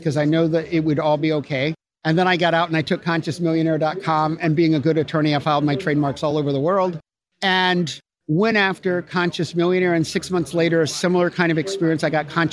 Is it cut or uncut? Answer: uncut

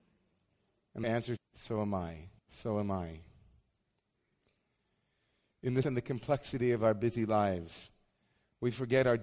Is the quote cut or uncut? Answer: cut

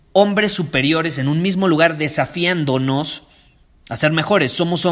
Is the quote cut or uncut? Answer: uncut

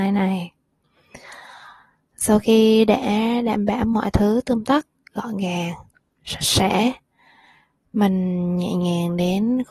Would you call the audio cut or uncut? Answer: uncut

